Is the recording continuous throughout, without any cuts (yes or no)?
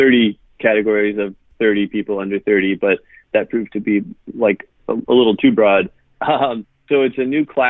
yes